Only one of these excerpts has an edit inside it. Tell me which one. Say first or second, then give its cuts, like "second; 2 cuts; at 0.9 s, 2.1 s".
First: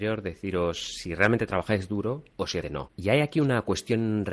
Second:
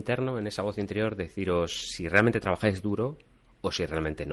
first; 2 cuts; at 2.3 s, 2.6 s